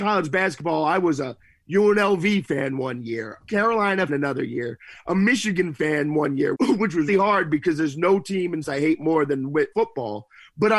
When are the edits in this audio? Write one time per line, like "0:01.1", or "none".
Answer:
0:03.4
0:04.1
0:06.5
0:07.1
0:08.6
0:09.7